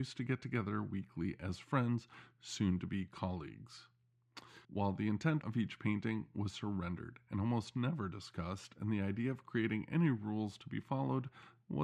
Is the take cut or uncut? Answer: cut